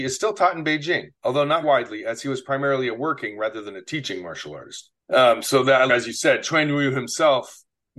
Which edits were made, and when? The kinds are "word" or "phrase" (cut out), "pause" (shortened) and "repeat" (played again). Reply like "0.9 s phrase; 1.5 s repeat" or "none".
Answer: 1.1 s pause; 1.6 s word; 5.0 s pause; 5.9 s phrase

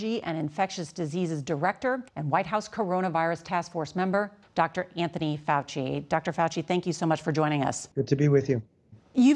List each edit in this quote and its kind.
2.1 s pause; 7.9 s pause

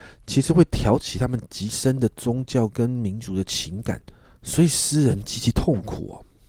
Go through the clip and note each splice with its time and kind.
4.2 s pause

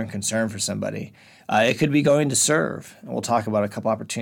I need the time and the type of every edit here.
none

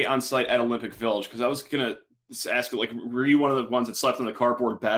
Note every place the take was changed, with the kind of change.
none

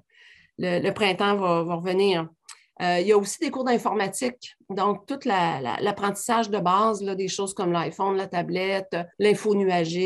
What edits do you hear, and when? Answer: 9.1 s pause

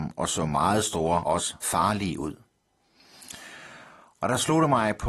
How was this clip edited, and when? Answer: 1.2 s word; 1.6 s word

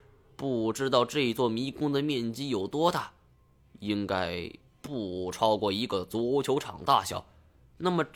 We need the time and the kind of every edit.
none

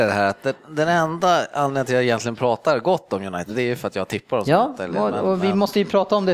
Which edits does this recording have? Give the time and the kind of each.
none

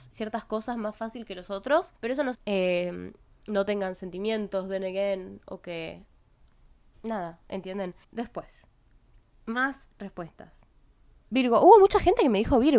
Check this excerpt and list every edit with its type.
2.0 s pause; 2.3 s phrase; 8.0 s pause

